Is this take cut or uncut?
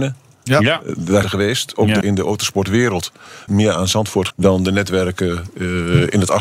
cut